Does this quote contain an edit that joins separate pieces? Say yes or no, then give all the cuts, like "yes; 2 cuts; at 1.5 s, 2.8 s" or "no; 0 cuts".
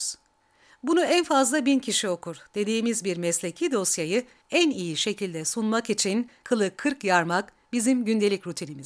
no; 0 cuts